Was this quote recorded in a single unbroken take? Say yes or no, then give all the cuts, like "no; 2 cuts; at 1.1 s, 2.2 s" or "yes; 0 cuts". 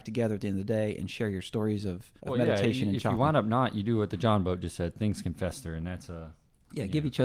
no; 1 cut; at 2.2 s